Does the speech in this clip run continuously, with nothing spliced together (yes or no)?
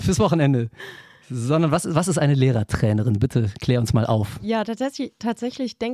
yes